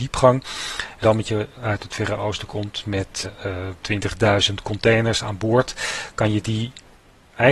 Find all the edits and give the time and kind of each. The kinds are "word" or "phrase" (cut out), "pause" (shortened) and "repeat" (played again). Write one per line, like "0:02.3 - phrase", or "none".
0:01.0 - phrase
0:01.5 - word
0:03.2 - word
0:03.8 - pause